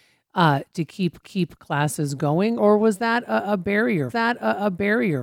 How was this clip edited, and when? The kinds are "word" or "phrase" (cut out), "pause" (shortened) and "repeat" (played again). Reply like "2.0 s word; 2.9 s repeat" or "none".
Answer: 1.2 s repeat; 2.6 s word; 4.1 s repeat